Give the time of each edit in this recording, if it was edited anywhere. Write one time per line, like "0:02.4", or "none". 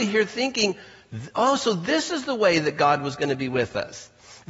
none

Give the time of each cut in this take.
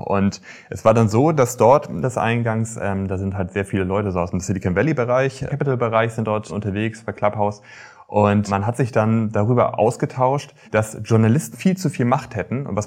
0:02.0
0:05.5
0:10.6
0:11.5

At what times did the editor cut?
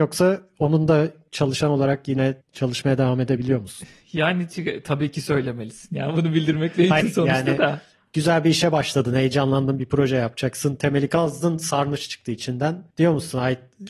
0:02.4
0:07.0
0:12.9

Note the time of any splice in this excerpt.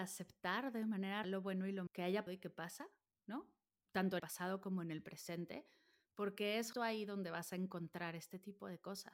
0:01.2
0:01.9
0:02.3
0:03.8
0:04.2
0:06.7

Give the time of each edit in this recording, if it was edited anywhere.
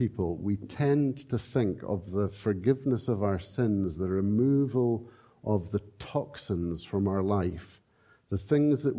none

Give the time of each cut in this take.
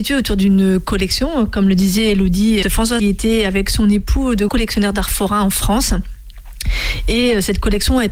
0:02.6
0:03.0
0:04.5

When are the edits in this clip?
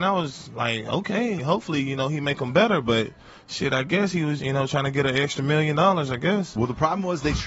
0:01.4
0:04.4

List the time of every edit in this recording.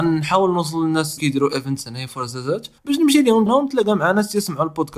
0:01.2
0:02.8
0:03.5

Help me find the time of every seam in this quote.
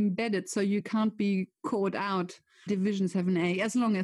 0:02.7

